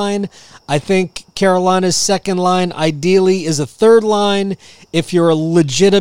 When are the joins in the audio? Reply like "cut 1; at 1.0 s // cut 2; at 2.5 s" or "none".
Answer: none